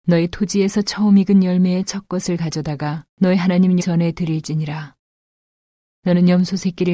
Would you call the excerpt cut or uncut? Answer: cut